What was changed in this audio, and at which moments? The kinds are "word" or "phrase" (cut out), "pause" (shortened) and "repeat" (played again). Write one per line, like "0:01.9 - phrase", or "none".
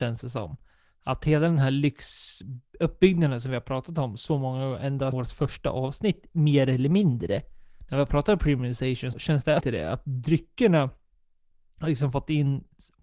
0:05.1 - word
0:09.1 - word
0:09.6 - phrase